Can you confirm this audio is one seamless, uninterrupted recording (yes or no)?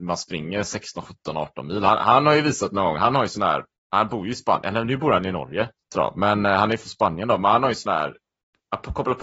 no